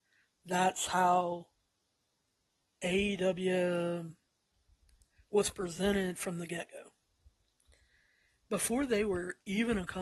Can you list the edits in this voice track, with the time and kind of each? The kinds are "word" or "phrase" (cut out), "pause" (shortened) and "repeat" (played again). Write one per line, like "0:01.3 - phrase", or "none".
none